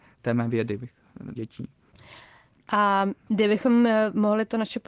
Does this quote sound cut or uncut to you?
cut